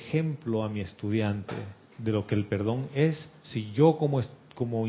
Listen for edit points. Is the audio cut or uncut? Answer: uncut